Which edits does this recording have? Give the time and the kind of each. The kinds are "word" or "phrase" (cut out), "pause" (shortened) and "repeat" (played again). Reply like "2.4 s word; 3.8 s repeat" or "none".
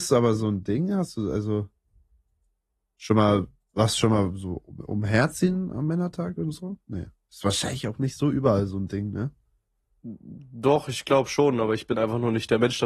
none